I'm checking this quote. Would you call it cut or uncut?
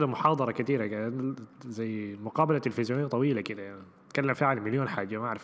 uncut